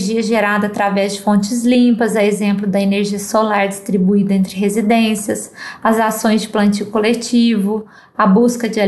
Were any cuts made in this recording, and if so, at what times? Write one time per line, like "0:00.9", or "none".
none

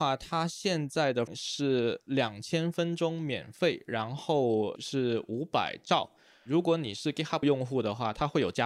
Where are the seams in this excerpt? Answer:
0:01.3
0:04.8
0:07.4

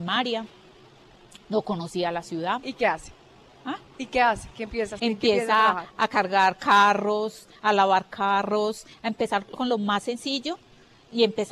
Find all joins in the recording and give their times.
0:05.0

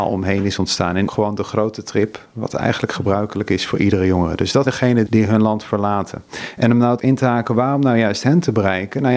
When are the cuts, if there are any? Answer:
0:01.1
0:04.7
0:05.1
0:07.0

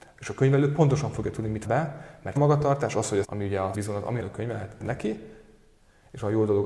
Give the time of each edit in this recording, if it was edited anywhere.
0:01.6
0:02.4
0:03.2
0:03.7
0:04.2
0:04.8

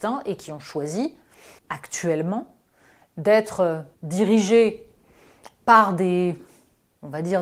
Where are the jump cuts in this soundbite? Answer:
0:01.6
0:03.9

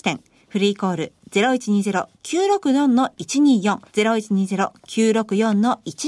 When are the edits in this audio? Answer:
0:03.9

